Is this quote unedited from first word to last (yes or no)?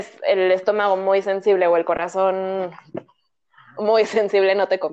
yes